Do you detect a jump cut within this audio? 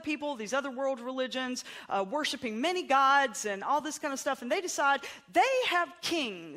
no; 0 cuts

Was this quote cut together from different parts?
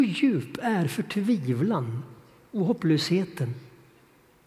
no; 0 cuts

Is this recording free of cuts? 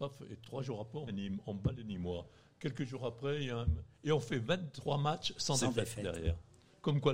no; 1 cut; at 1.1 s

